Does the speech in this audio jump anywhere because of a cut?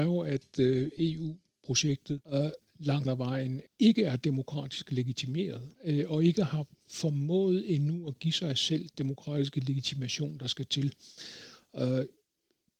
yes; 5 cuts; at 2.2 s, 3.0 s, 5.7 s, 6.7 s, 8.9 s

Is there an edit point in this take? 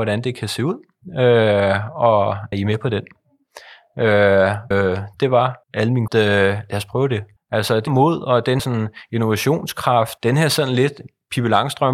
yes; 8 cuts; at 2.5 s, 4.7 s, 5.6 s, 6.1 s, 7.4 s, 7.9 s, 8.6 s, 10.2 s

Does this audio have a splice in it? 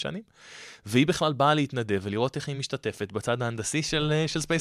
no; 0 cuts

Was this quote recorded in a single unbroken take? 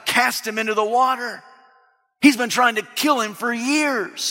yes; 0 cuts

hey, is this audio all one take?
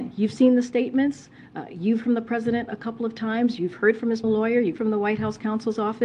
no; 3 cuts; at 2.0 s, 4.2 s, 4.8 s

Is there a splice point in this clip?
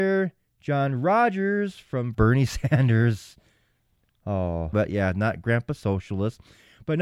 yes; 2 cuts; at 2.1 s, 4.7 s

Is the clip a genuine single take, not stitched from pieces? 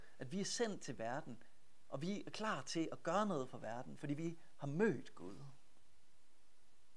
yes; 0 cuts

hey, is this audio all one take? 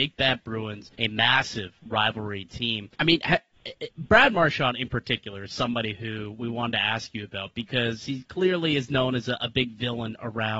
no; 3 cuts; at 0.9 s, 2.9 s, 3.9 s

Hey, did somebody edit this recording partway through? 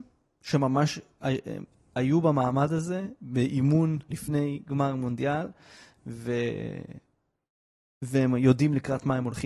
yes; 1 cut; at 4.1 s

